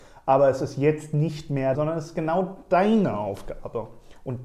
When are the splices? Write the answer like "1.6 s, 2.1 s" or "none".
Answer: 1.7 s